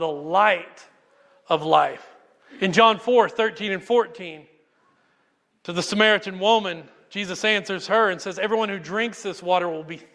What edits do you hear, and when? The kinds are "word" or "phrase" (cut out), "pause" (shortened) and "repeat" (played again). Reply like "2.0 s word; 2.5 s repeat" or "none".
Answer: none